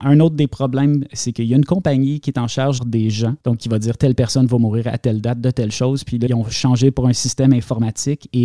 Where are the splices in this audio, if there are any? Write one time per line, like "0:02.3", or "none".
0:02.8
0:03.4
0:06.3